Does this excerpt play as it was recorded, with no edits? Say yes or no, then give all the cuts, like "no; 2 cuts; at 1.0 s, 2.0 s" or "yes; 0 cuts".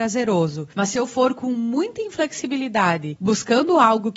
yes; 0 cuts